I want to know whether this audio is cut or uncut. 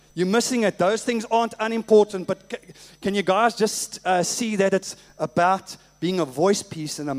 uncut